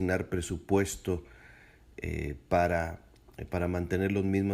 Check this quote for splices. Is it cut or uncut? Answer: uncut